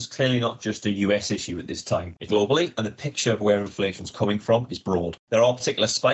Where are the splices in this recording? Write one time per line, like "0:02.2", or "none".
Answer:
0:02.3